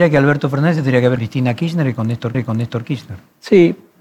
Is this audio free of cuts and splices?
no; 2 cuts; at 1.2 s, 2.3 s

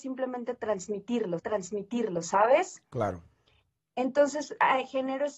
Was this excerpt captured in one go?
no; 1 cut; at 1.4 s

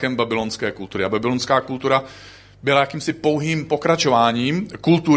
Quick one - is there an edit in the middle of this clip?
no; 0 cuts

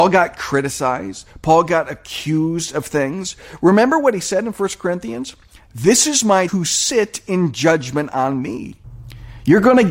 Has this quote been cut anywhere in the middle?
yes; 1 cut; at 6.5 s

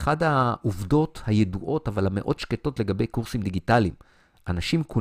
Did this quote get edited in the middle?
no; 0 cuts

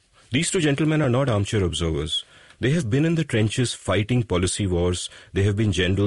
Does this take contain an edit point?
no; 0 cuts

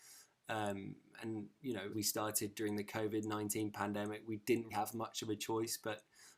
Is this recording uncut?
no; 2 cuts; at 1.9 s, 4.7 s

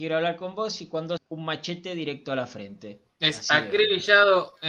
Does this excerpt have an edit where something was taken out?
yes; 1 cut; at 1.2 s

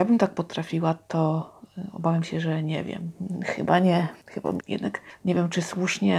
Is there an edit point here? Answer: yes; 1 cut; at 4.6 s

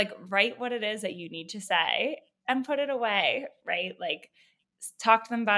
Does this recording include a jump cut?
no; 0 cuts

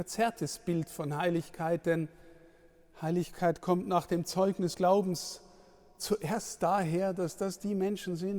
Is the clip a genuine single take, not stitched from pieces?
no; 1 cut; at 4.7 s

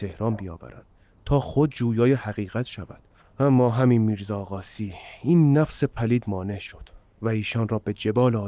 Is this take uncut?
no; 1 cut; at 3.2 s

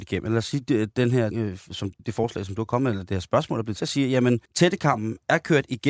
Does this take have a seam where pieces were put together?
yes; 4 cuts; at 1.3 s, 2.0 s, 3.8 s, 4.5 s

